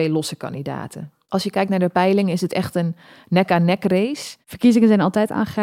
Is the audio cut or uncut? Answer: uncut